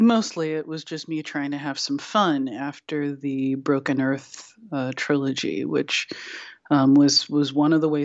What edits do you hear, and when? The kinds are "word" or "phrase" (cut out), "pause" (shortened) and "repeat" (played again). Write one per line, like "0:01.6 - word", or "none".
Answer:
none